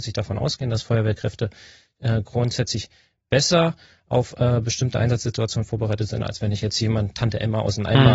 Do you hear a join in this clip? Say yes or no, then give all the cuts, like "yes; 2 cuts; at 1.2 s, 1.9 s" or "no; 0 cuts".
no; 0 cuts